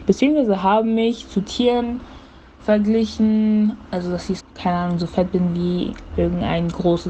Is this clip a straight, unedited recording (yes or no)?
no